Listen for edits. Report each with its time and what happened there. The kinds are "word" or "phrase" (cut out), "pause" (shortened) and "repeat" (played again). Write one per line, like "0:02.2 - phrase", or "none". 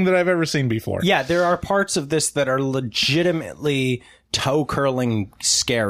none